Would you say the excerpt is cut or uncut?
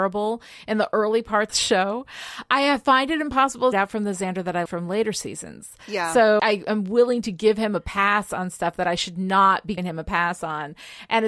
cut